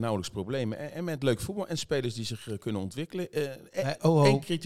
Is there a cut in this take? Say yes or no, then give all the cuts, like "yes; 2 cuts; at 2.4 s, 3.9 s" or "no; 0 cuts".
no; 0 cuts